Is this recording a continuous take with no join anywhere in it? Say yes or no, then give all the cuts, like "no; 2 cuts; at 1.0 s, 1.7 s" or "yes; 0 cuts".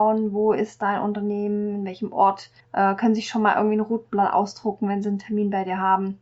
no; 1 cut; at 2.6 s